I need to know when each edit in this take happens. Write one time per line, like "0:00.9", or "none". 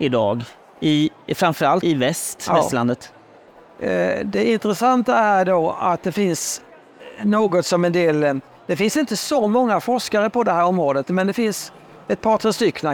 0:01.8